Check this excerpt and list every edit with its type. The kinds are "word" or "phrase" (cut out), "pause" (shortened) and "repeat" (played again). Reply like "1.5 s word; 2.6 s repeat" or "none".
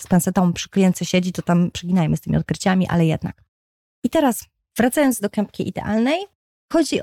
1.7 s word